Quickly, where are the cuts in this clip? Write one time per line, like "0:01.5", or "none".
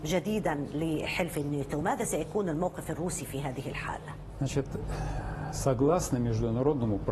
none